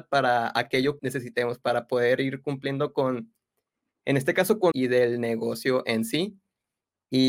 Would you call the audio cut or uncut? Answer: cut